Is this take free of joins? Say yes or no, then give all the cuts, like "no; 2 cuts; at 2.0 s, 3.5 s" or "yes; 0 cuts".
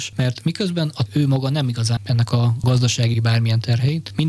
no; 4 cuts; at 1.1 s, 2.0 s, 2.3 s, 3.1 s